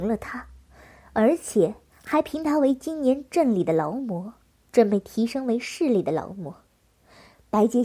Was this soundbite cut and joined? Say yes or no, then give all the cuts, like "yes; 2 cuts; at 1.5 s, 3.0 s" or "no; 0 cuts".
no; 0 cuts